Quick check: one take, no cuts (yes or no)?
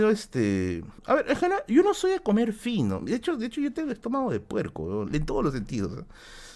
no